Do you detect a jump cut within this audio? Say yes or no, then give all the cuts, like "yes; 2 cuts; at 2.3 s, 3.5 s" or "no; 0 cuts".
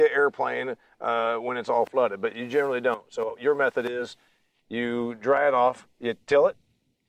no; 0 cuts